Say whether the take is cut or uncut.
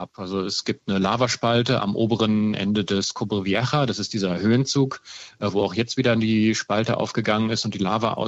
uncut